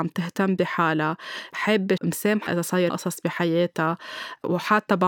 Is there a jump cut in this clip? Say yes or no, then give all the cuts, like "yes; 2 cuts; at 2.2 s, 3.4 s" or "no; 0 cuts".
yes; 3 cuts; at 2.0 s, 2.5 s, 2.9 s